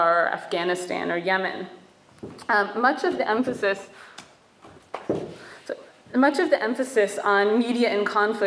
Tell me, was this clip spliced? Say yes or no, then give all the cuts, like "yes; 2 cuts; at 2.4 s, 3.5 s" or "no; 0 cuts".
no; 0 cuts